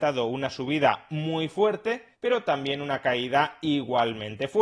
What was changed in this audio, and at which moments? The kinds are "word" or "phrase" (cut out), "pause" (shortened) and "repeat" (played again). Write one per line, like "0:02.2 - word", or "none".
0:02.1 - pause